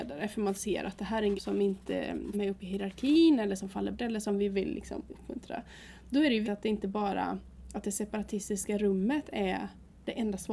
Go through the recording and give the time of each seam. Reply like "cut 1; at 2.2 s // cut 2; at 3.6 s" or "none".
cut 1; at 1.3 s // cut 2; at 2.3 s // cut 3; at 3.9 s // cut 4; at 6.4 s